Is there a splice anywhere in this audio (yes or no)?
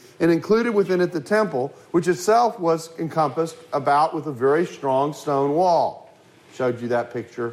no